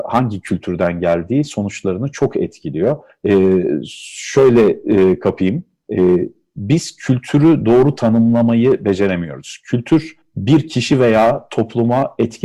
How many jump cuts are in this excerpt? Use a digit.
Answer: 0